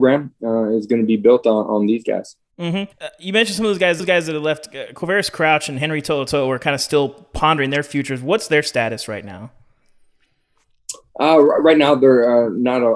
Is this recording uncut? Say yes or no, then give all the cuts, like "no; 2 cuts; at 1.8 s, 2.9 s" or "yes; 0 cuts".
no; 2 cuts; at 2.9 s, 4.0 s